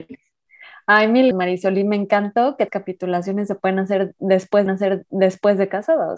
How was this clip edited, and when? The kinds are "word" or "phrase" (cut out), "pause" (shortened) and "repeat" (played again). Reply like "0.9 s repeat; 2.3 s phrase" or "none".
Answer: 1.3 s word; 2.7 s phrase; 4.7 s repeat